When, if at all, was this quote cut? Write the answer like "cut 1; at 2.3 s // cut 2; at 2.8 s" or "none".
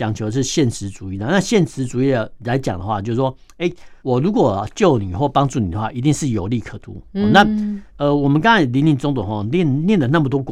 cut 1; at 4.0 s // cut 2; at 7.9 s